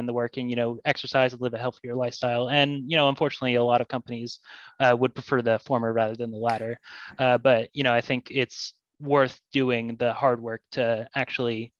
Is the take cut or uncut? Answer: uncut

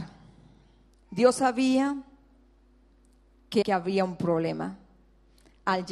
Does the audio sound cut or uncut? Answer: cut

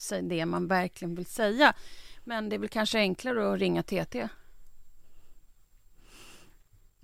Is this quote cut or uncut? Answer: uncut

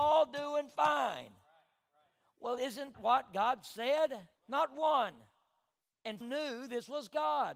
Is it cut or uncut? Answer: cut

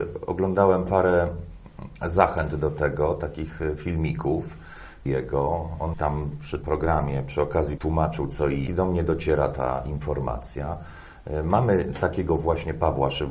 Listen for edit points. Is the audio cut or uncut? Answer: cut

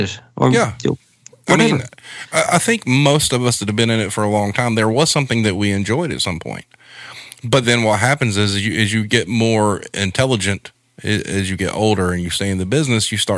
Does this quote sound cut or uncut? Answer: uncut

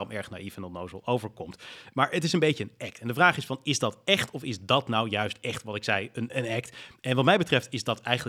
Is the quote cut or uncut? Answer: cut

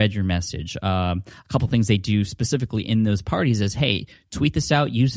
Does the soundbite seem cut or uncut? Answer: uncut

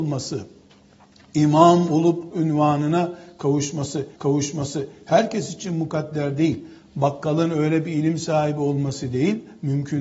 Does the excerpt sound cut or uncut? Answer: cut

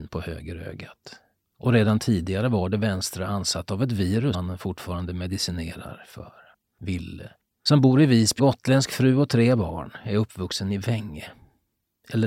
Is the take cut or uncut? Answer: cut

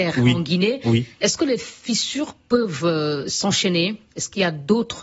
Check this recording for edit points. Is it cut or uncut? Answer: uncut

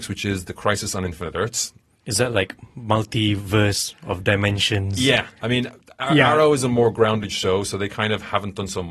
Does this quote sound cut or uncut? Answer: uncut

